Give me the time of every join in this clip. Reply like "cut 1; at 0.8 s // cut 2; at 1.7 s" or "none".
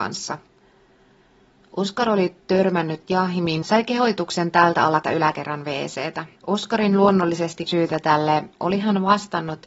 cut 1; at 3.6 s // cut 2; at 5.0 s // cut 3; at 6.4 s // cut 4; at 7.7 s